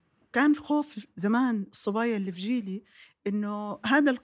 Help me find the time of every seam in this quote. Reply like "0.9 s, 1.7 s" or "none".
none